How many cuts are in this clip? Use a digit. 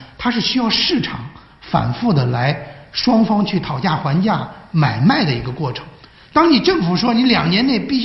0